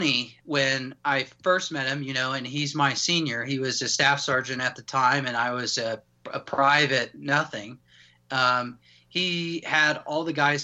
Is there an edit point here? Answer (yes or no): no